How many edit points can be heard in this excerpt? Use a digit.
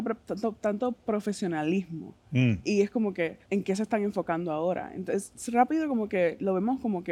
1